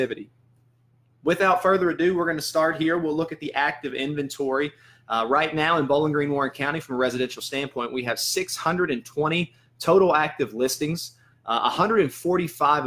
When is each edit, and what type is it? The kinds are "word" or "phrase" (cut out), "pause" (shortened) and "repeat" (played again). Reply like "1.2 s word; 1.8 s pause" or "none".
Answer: none